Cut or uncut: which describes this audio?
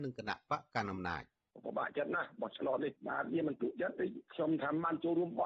uncut